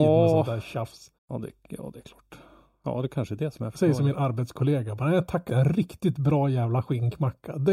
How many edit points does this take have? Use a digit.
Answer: 2